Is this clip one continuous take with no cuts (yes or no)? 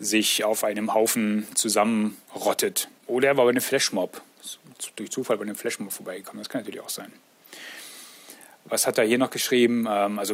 yes